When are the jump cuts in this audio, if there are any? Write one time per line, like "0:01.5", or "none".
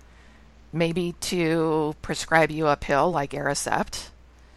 none